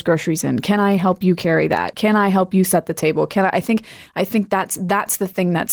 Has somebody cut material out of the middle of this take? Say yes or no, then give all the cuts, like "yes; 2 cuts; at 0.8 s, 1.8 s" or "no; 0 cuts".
no; 0 cuts